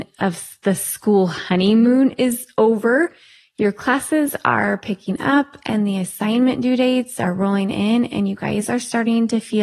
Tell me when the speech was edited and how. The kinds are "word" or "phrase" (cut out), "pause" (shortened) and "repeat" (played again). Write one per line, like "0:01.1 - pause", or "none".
none

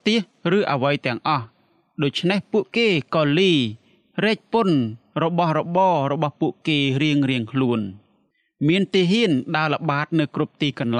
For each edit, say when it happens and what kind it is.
none

